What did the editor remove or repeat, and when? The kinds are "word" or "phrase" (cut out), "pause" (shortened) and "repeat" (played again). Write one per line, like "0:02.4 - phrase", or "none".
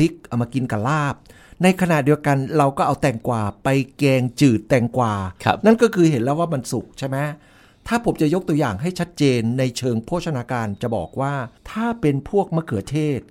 0:05.4 - pause
0:11.6 - pause